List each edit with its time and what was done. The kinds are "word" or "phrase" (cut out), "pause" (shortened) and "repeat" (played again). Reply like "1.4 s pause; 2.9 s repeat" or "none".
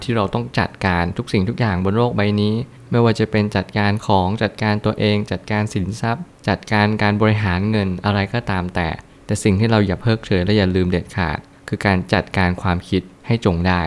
none